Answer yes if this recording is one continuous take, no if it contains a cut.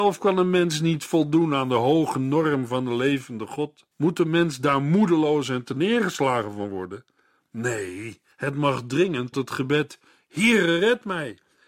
no